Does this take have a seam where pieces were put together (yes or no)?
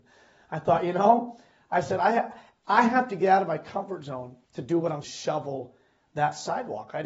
yes